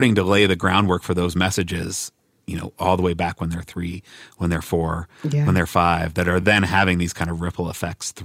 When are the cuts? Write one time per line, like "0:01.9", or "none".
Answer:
none